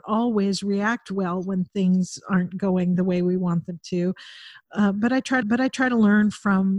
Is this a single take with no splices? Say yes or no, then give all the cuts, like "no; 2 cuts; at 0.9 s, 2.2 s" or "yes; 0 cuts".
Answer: no; 1 cut; at 5.4 s